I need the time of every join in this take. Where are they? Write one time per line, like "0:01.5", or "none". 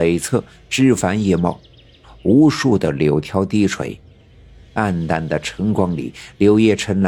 none